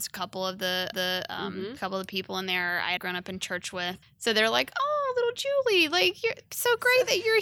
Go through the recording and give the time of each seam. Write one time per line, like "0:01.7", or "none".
0:00.9
0:03.0
0:04.0

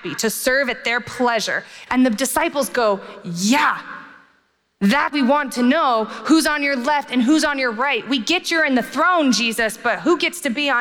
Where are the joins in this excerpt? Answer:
0:05.1

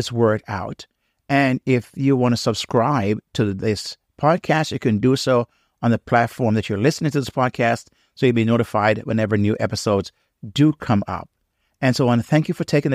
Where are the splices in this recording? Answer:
none

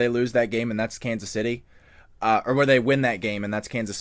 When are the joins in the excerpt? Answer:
none

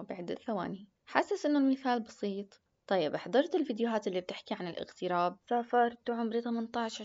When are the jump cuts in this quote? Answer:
0:01.0
0:02.7
0:05.4

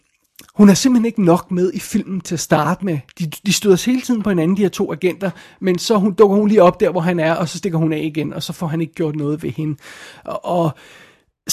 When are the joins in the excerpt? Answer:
none

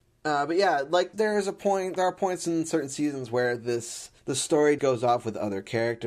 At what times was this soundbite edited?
0:01.1
0:04.2
0:04.8

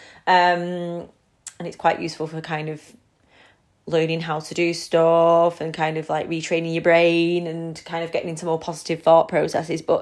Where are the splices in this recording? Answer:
none

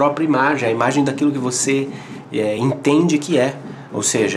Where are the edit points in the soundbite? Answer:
none

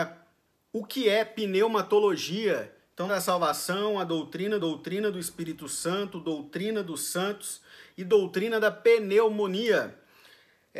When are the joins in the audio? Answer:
0:03.1
0:04.6

